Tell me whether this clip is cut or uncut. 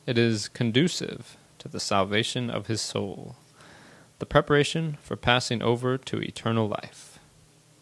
uncut